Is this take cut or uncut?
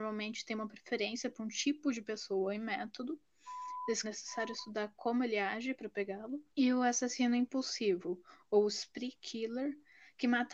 cut